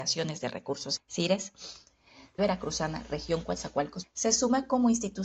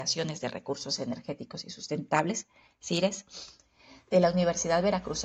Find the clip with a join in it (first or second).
first